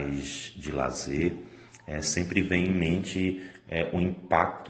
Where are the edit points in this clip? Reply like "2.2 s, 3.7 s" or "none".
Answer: none